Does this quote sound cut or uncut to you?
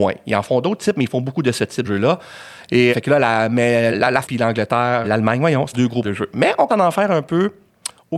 cut